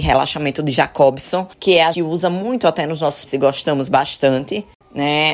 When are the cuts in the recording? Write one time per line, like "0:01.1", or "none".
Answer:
0:01.5
0:01.9
0:03.3